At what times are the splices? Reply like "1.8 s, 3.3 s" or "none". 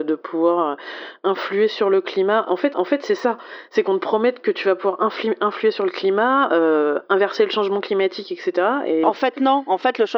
2.7 s, 9.0 s